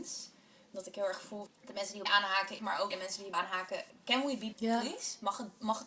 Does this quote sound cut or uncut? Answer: cut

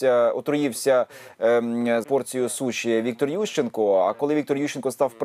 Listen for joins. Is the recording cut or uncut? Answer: cut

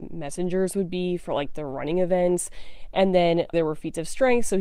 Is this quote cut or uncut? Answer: cut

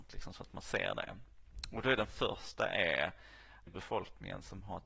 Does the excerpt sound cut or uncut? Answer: cut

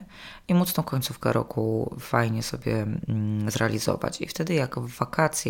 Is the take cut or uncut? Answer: uncut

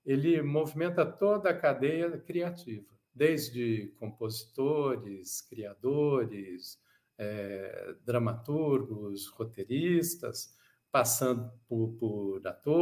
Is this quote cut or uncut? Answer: cut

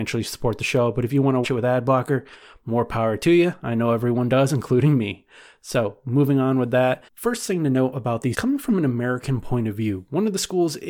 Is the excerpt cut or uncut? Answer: cut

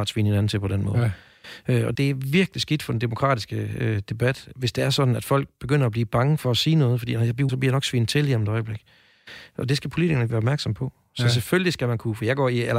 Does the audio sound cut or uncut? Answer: cut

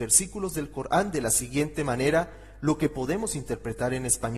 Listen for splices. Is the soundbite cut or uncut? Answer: uncut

